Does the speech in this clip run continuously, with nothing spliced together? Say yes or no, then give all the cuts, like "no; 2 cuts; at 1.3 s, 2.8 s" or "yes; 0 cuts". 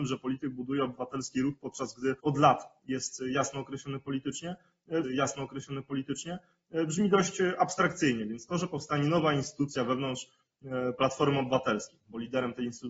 no; 2 cuts; at 2.2 s, 5.0 s